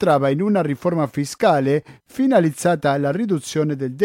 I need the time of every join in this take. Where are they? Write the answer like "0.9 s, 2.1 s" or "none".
none

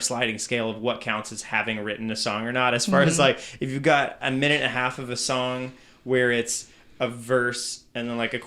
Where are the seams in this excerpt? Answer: none

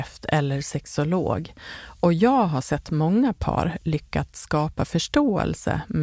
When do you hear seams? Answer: none

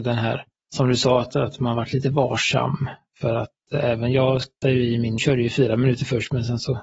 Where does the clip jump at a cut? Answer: 4.6 s, 5.2 s

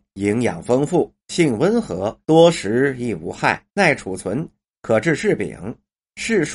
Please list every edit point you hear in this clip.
1.2 s, 2.2 s, 3.7 s

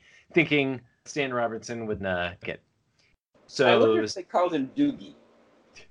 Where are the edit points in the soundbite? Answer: 1.1 s, 2.0 s, 2.4 s

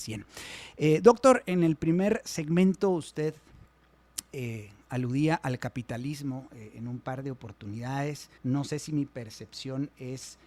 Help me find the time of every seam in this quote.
8.4 s

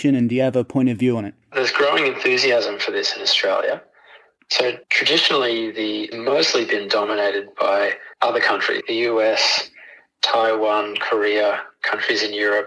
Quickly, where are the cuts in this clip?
1.4 s, 4.8 s, 6.1 s, 8.1 s, 8.8 s

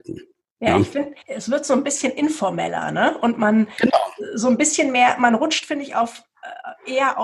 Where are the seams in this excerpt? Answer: 1.2 s

